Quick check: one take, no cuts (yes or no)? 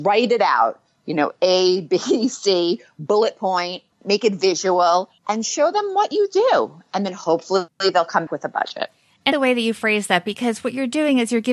no